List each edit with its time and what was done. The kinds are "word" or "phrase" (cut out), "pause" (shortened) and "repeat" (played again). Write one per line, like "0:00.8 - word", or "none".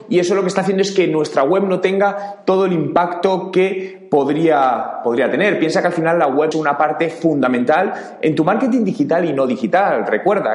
0:06.5 - word

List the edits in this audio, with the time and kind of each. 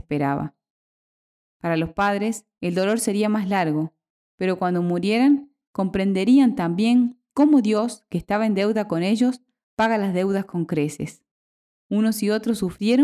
none

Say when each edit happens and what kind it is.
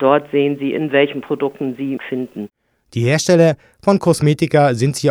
0:02.0 - word

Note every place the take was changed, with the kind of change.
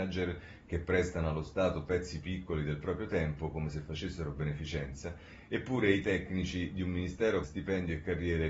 0:07.4 - word

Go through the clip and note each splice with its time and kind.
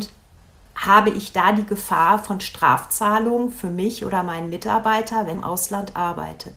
0:05.3 - word

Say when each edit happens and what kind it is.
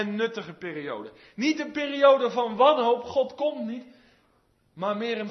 none

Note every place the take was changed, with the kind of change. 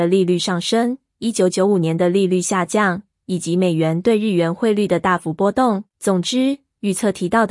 0:05.9 - pause

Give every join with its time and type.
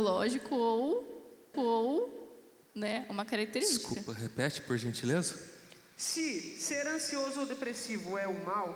0:01.5 - repeat

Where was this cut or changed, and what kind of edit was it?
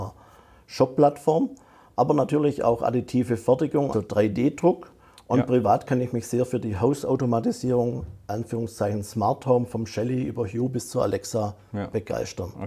0:03.9 - word

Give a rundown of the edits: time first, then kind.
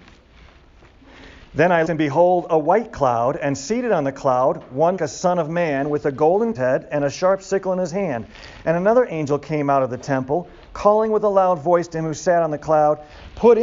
0:01.8 - word
0:05.0 - word
0:06.5 - phrase

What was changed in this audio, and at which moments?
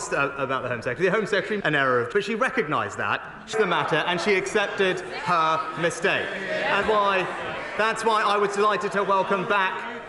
0:01.6 - word
0:02.1 - word
0:03.5 - word
0:06.8 - word

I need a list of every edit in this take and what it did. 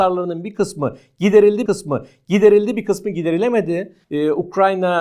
0:01.7 - repeat
0:04.0 - pause

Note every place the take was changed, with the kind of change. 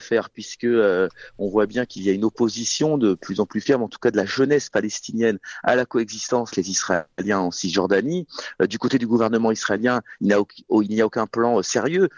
0:06.5 - word

